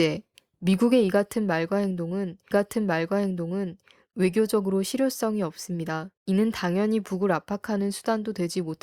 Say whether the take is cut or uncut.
cut